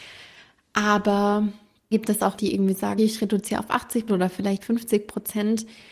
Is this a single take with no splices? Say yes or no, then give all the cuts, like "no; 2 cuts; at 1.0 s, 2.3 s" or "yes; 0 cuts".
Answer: no; 5 cuts; at 1.9 s, 2.4 s, 3.0 s, 4.1 s, 4.6 s